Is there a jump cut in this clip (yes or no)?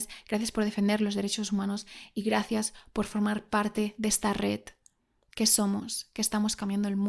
no